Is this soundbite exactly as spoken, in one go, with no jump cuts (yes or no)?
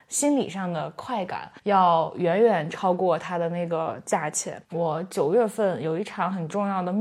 no